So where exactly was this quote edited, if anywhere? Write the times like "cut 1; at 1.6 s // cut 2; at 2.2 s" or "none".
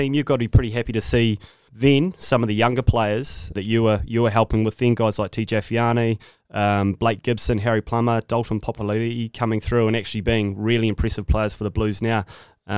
cut 1; at 1.7 s // cut 2; at 3.6 s